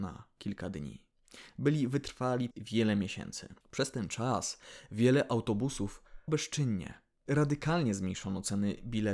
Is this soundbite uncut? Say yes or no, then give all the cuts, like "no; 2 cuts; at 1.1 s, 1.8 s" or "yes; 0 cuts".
no; 3 cuts; at 2.5 s, 3.6 s, 6.3 s